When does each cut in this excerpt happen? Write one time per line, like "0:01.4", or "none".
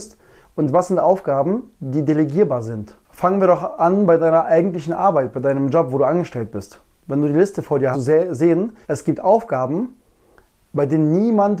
0:07.9
0:08.8